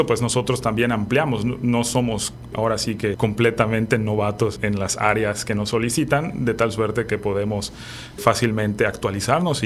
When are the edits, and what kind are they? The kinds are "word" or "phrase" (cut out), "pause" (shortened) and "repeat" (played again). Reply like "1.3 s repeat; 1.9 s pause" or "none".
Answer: 2.5 s word; 3.1 s word; 4.6 s word; 8.2 s word